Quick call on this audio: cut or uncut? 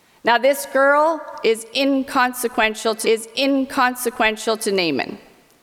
cut